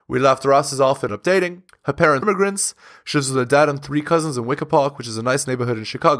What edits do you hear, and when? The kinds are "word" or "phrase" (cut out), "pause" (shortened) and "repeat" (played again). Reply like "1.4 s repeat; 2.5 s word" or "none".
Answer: 1.1 s word; 1.7 s pause; 2.2 s word